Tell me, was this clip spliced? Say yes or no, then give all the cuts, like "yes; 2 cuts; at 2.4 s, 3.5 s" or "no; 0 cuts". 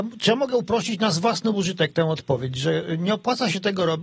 no; 0 cuts